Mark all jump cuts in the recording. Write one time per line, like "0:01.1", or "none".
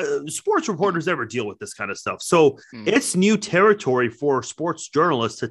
0:02.6